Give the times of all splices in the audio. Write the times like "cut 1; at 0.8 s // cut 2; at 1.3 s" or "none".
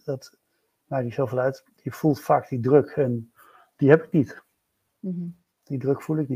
none